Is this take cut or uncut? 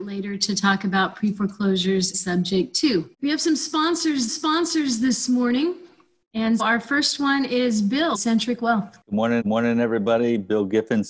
cut